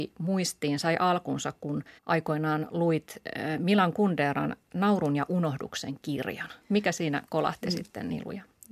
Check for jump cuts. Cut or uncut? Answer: cut